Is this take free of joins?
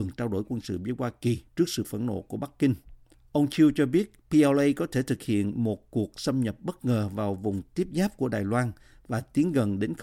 no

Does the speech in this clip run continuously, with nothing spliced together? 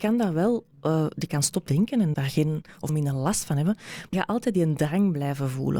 no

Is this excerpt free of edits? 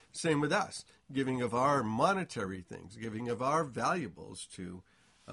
yes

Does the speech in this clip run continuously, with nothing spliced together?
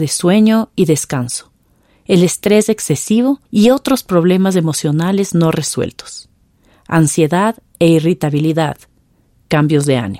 no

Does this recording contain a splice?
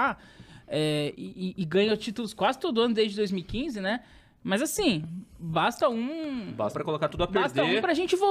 yes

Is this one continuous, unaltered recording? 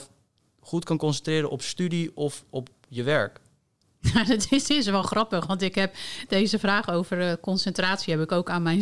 yes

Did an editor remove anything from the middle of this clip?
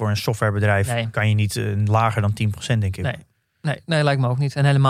no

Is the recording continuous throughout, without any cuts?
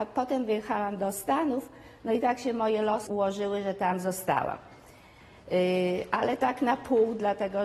yes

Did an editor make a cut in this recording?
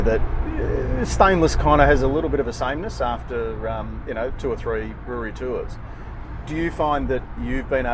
no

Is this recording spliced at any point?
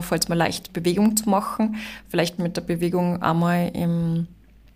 yes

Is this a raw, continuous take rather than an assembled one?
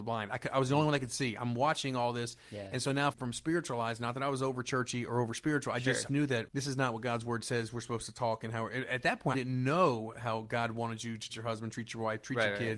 no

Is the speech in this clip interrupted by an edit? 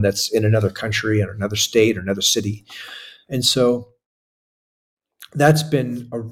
no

